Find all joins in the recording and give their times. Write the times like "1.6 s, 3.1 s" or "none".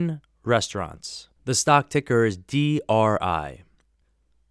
1.4 s